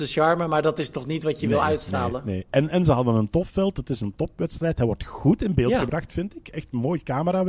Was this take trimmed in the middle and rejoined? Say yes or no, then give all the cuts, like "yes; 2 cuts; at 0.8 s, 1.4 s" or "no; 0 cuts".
no; 0 cuts